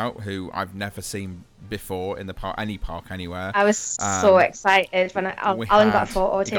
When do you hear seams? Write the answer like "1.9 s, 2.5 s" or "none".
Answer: none

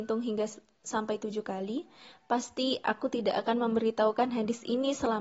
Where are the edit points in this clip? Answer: none

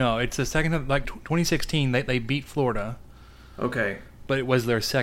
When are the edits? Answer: 1.0 s

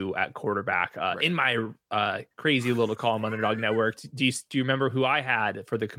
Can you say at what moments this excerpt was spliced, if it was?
2.3 s

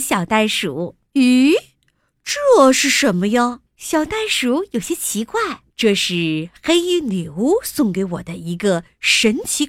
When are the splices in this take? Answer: 1.1 s, 3.7 s, 5.7 s

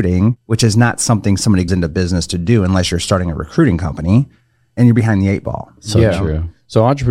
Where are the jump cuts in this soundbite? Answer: 1.7 s

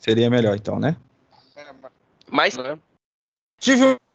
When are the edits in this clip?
2.5 s

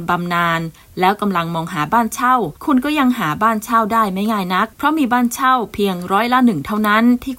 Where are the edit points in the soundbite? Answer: 2.6 s

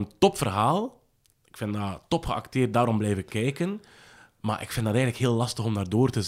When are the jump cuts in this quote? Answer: none

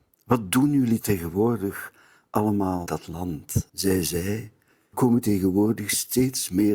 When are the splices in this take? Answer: 1.0 s, 2.9 s, 3.7 s, 4.9 s

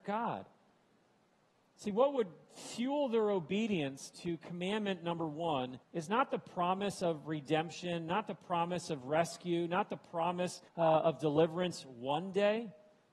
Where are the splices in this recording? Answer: 5.8 s, 10.7 s

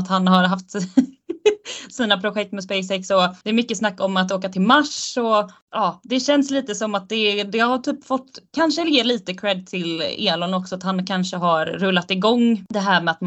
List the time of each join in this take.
3.4 s

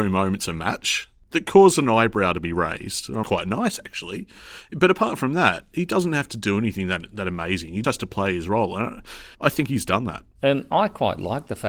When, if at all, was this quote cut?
3.2 s, 7.8 s, 9.3 s

